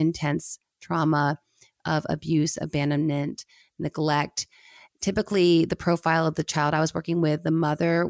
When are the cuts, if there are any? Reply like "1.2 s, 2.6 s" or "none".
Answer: none